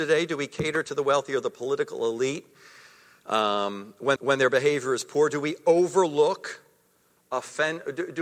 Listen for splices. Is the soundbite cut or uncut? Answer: cut